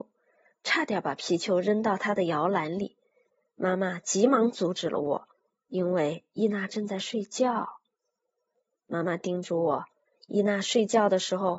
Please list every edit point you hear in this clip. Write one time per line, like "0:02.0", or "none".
none